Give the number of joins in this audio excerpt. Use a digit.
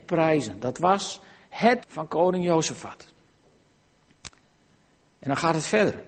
1